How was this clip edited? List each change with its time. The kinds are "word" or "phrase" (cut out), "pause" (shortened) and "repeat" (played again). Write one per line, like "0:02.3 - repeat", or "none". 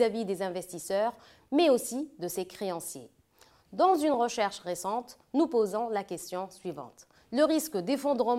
none